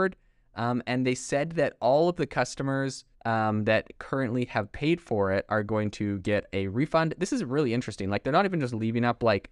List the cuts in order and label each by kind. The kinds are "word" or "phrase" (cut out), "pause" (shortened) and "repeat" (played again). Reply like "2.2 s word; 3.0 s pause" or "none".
3.1 s pause